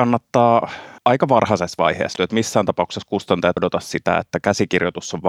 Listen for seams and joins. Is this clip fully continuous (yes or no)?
no